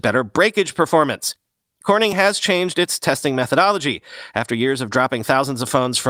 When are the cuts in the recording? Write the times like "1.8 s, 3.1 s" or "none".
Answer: none